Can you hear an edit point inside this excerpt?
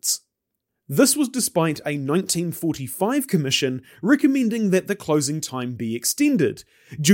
no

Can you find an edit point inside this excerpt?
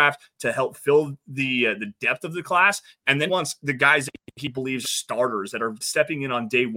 yes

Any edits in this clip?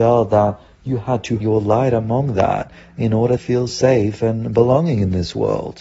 yes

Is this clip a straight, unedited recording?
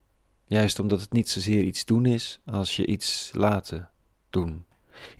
yes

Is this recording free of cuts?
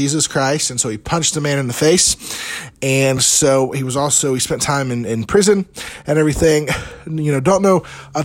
yes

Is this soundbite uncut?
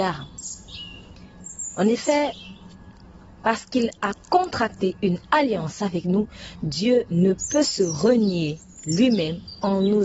yes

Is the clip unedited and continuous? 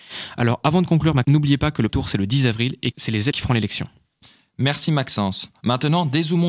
no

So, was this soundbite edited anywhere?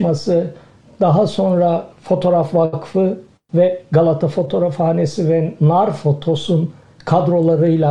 no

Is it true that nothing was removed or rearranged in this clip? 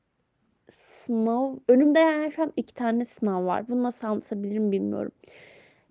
no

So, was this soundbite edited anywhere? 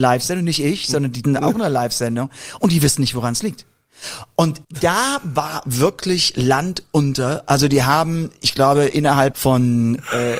yes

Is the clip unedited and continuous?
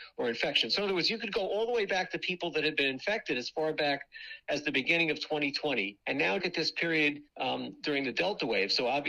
no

